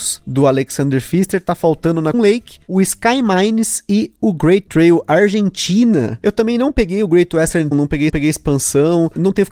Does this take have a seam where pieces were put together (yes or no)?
yes